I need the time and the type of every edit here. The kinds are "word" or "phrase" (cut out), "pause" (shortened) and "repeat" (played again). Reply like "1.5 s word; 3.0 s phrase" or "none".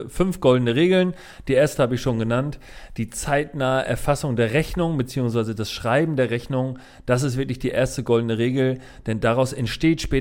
none